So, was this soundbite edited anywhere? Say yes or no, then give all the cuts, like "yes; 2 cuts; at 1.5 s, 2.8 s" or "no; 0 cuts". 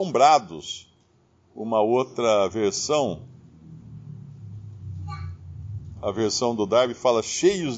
no; 0 cuts